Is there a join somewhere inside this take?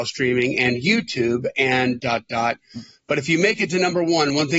yes; 1 cut; at 2.0 s

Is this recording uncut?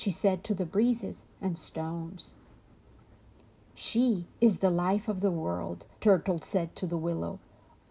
no; 2 cuts; at 4.3 s, 5.9 s

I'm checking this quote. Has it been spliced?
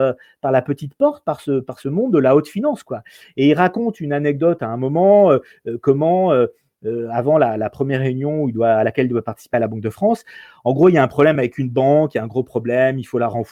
no; 0 cuts

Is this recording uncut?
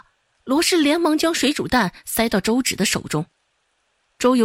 yes; 0 cuts

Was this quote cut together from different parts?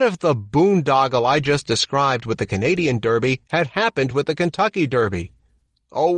no; 0 cuts

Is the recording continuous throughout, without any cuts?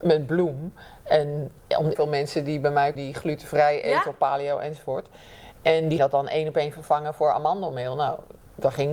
no; 3 cuts; at 1.9 s, 2.9 s, 6.0 s

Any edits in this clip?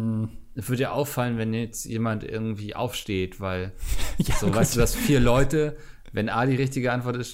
no; 0 cuts

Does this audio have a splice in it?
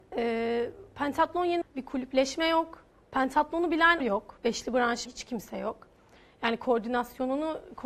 yes; 3 cuts; at 1.6 s, 4.0 s, 5.1 s

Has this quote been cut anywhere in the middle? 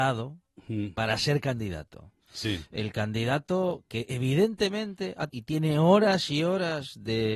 yes; 1 cut; at 5.3 s

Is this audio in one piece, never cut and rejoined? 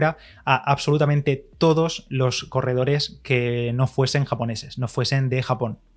yes; 0 cuts

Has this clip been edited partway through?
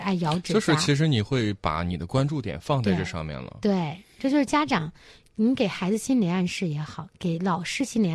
no; 0 cuts

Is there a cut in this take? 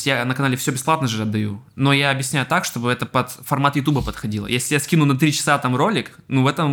no; 0 cuts

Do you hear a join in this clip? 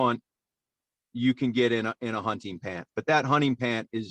no; 0 cuts

